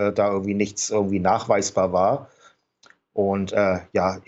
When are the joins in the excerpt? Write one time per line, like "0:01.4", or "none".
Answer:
none